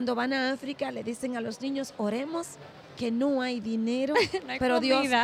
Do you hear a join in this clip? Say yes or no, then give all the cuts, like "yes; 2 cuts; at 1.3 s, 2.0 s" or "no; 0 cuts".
no; 0 cuts